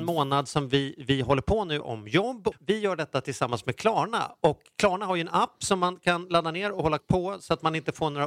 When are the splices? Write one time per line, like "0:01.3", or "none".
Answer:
0:01.8
0:02.6
0:07.0